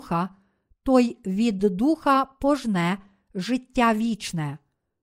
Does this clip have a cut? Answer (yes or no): no